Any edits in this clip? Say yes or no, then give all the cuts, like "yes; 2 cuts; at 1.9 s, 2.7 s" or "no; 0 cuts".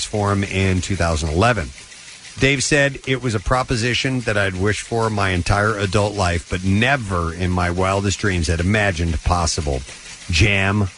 no; 0 cuts